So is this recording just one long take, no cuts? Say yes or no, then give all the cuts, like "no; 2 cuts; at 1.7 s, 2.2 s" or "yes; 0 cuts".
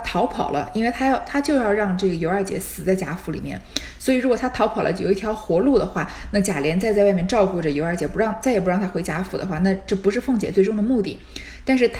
yes; 0 cuts